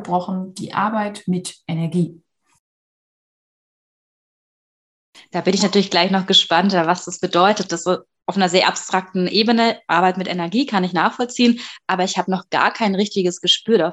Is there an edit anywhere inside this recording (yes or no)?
no